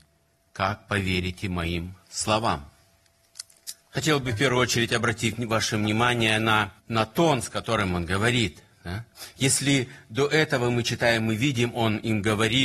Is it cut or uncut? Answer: cut